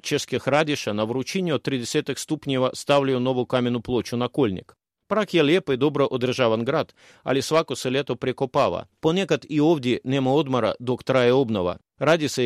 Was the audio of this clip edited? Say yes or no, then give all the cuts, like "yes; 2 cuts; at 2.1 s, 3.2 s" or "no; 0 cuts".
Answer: no; 0 cuts